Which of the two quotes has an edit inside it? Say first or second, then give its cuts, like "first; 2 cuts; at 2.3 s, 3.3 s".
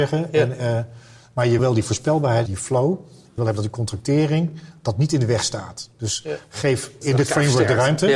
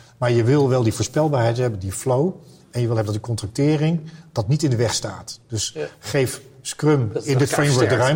first; 4 cuts; at 1.6 s, 2.5 s, 3.4 s, 7.0 s